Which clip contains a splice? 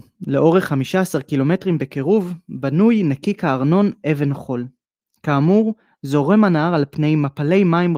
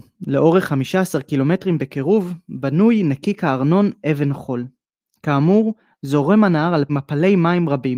second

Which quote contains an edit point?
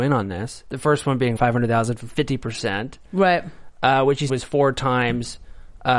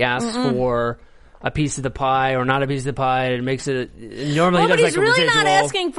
first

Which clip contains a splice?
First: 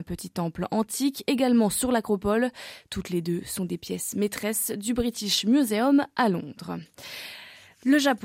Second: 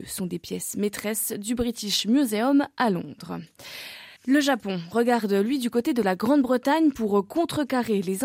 second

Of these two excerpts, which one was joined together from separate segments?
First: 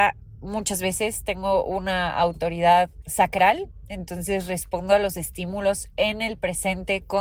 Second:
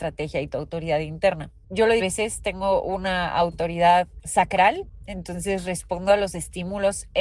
second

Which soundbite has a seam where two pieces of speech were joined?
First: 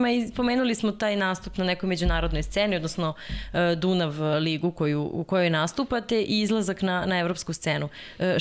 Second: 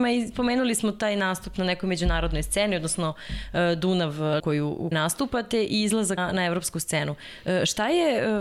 second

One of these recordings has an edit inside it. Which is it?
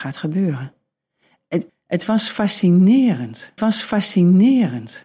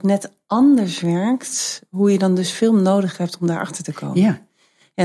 first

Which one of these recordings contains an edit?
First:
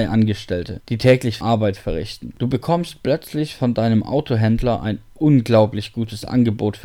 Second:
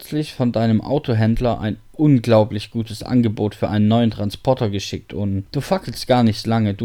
first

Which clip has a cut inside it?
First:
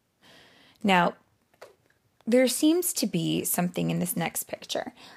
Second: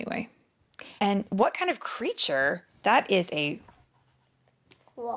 second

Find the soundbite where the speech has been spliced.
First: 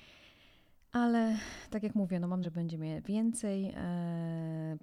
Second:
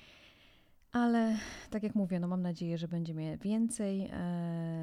first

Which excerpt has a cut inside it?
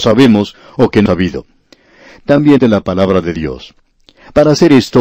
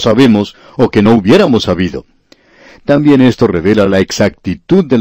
first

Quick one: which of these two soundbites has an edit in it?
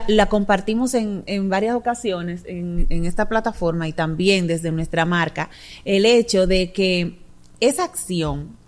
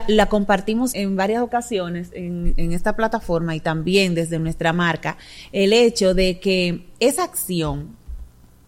second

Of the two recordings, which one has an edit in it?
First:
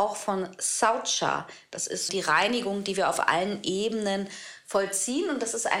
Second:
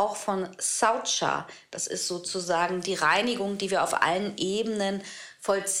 first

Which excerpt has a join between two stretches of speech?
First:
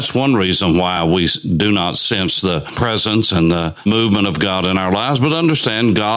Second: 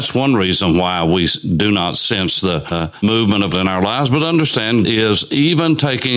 second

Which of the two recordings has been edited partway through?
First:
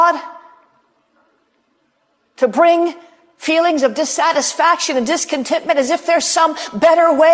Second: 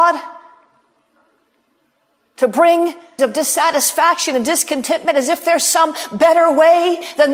second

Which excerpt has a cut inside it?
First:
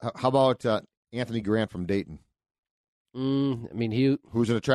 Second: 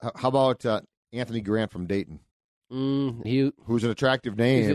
second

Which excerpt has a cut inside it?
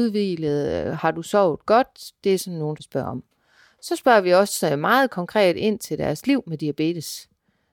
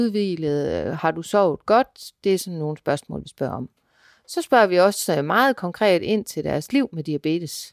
first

